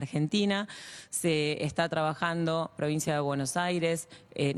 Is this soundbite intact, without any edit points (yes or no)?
yes